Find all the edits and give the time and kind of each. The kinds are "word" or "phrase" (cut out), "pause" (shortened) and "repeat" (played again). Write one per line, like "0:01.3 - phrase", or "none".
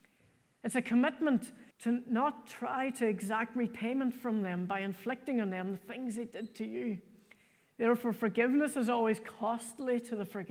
0:01.7 - pause